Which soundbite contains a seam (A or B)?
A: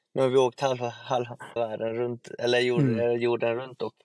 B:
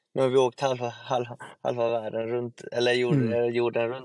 A